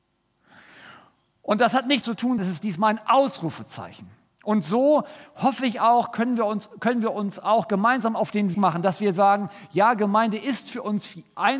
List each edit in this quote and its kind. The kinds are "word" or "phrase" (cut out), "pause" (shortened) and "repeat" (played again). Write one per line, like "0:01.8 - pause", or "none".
0:02.0 - phrase
0:02.4 - word
0:08.5 - word